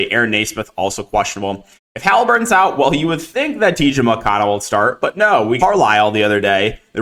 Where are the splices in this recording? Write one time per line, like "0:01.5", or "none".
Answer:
0:01.8
0:05.6